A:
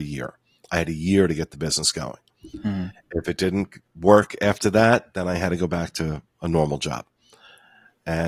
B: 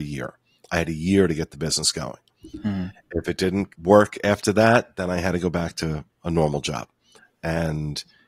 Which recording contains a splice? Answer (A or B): B